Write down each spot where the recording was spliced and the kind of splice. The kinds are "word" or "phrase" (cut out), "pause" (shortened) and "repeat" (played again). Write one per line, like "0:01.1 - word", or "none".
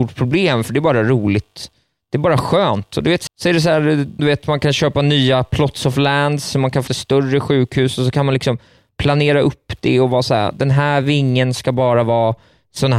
0:03.3 - word
0:04.2 - word
0:06.9 - word